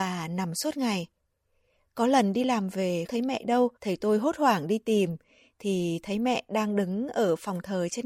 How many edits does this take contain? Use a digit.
2